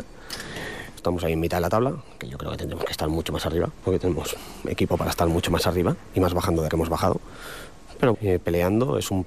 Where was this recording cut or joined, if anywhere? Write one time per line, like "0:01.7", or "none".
0:01.0
0:06.7
0:08.1